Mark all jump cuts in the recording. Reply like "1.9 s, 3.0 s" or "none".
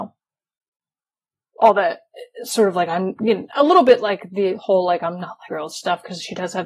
5.5 s